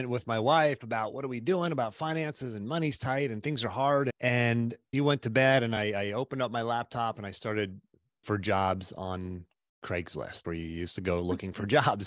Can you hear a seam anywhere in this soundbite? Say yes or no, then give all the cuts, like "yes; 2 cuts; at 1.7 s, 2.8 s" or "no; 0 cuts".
yes; 3 cuts; at 4.9 s, 8.2 s, 10.4 s